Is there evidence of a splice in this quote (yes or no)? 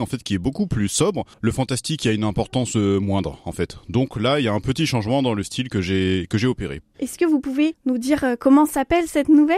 yes